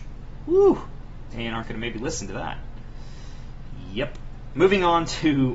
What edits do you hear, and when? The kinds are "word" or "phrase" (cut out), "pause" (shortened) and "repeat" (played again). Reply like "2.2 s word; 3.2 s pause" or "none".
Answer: 1.3 s phrase; 1.6 s phrase